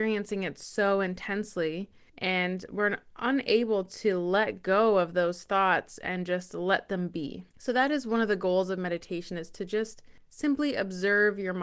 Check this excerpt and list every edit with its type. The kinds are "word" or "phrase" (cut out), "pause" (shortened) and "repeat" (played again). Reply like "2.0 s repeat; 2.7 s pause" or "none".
none